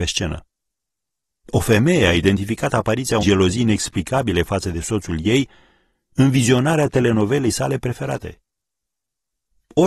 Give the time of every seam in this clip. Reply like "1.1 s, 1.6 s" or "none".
3.2 s